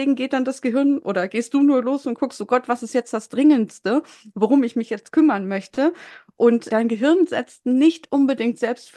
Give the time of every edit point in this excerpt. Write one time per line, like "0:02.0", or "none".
none